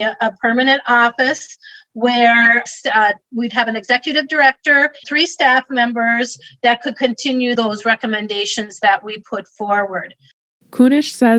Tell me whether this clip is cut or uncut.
cut